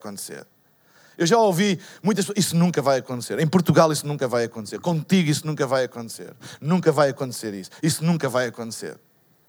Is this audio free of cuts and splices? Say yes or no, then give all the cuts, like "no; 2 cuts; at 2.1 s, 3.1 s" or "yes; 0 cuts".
yes; 0 cuts